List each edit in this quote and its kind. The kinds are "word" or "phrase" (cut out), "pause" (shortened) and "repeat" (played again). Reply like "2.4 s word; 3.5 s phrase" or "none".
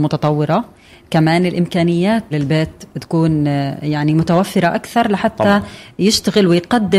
2.3 s word